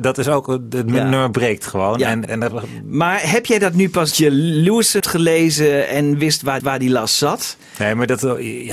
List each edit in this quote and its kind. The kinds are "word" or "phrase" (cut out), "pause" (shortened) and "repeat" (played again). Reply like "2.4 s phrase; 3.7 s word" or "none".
2.2 s word; 4.1 s word; 5.0 s word; 6.6 s repeat